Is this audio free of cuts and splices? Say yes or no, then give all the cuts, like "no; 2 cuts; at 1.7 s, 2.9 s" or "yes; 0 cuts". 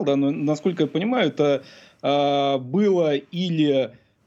yes; 0 cuts